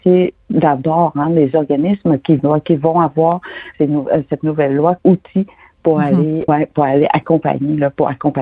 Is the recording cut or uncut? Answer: cut